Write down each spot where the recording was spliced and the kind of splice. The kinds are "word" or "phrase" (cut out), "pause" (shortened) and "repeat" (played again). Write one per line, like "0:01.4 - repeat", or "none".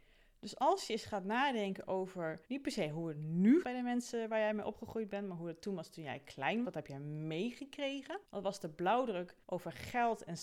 0:02.4 - pause
0:03.6 - word
0:06.6 - word
0:08.2 - pause
0:09.4 - pause